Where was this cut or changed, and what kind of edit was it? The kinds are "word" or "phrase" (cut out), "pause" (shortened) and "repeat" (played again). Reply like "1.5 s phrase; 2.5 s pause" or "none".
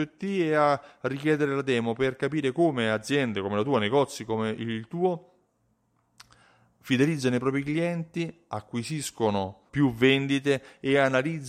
9.7 s word